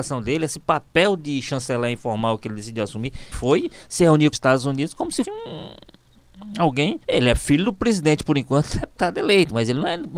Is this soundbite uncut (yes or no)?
no